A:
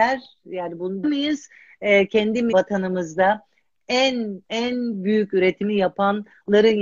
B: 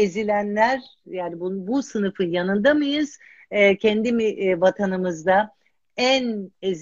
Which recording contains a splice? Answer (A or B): A